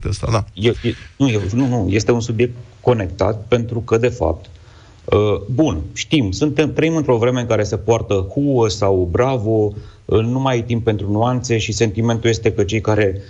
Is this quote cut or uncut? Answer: uncut